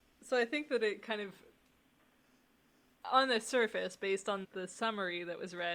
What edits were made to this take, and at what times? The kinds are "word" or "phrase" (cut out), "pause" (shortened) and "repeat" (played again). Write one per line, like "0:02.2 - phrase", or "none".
0:04.4 - word